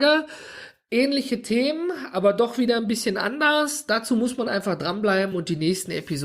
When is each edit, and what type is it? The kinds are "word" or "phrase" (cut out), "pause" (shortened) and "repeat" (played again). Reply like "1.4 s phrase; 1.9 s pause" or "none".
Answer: none